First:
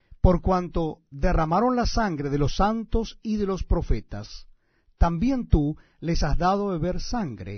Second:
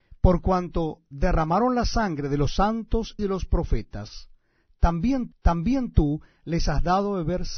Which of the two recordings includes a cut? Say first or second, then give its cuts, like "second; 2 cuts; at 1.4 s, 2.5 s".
second; 2 cuts; at 3.2 s, 5.3 s